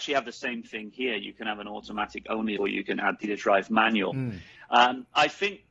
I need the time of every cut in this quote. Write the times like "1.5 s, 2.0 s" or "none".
2.6 s, 3.2 s